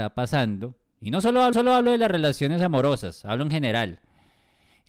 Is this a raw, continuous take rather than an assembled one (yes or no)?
no